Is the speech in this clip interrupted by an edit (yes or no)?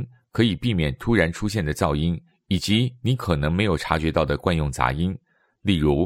no